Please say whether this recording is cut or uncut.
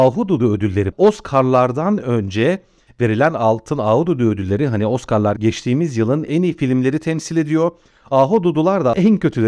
uncut